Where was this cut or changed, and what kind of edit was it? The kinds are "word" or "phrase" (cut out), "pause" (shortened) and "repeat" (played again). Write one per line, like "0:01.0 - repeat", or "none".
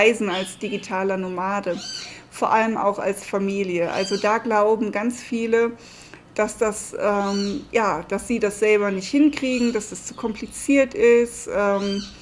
none